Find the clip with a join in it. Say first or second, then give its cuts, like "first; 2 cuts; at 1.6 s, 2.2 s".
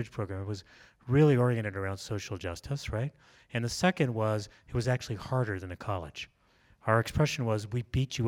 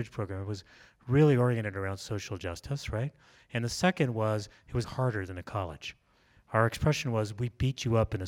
second; 1 cut; at 4.8 s